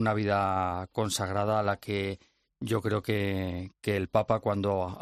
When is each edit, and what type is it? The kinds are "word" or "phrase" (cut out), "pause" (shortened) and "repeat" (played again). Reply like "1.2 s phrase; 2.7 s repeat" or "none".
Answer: none